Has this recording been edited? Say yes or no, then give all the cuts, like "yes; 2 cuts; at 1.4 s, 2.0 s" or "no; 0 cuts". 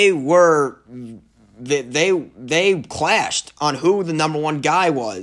no; 0 cuts